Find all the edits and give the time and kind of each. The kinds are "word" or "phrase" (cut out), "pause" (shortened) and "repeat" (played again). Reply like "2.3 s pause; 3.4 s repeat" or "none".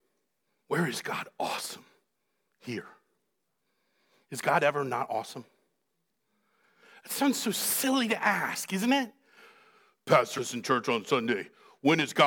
10.4 s word